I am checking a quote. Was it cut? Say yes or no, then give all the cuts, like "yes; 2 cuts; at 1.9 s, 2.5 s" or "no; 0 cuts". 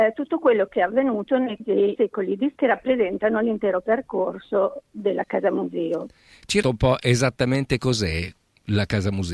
yes; 5 cuts; at 1.6 s, 1.9 s, 2.6 s, 6.6 s, 7.8 s